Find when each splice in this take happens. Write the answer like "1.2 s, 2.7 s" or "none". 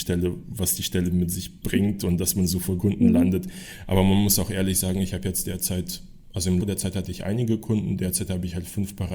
2.8 s, 6.6 s